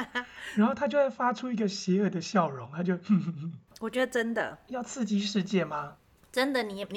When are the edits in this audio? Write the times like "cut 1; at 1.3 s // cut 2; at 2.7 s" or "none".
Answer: none